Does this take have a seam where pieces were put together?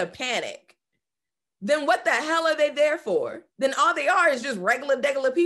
yes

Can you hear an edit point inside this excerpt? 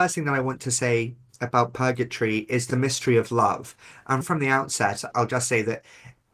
yes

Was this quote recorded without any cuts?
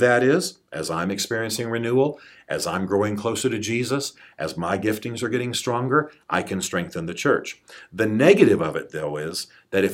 yes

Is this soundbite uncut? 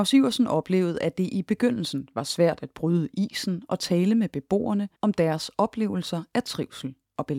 no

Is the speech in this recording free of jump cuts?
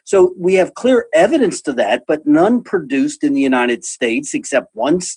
yes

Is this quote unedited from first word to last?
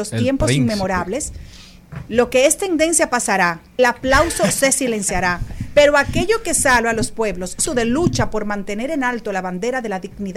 no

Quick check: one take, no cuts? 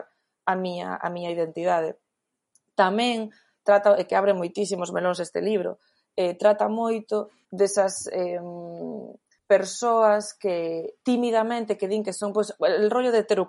yes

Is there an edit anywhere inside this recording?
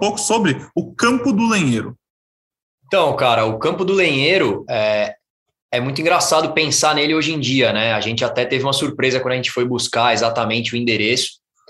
no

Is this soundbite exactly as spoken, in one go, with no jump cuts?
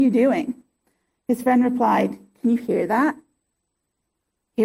yes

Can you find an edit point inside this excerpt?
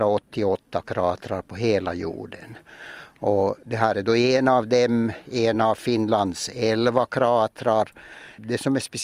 no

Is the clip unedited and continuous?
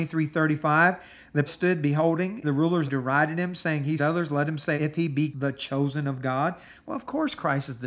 no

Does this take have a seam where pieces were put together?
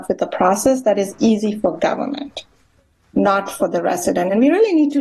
no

